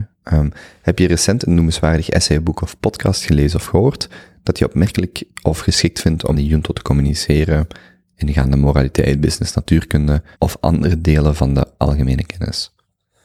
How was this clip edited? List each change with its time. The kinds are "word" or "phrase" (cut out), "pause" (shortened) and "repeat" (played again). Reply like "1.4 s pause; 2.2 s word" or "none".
6.3 s word; 10.3 s pause